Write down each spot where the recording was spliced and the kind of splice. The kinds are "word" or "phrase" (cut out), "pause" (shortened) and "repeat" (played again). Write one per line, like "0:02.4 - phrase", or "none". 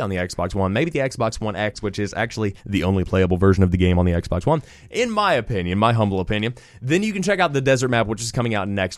0:02.6 - pause